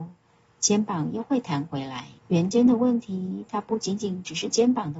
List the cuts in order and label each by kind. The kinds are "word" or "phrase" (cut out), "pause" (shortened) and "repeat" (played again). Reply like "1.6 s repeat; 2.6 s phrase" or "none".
2.2 s pause